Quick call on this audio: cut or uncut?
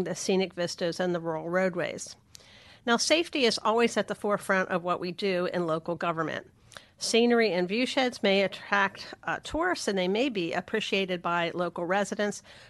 uncut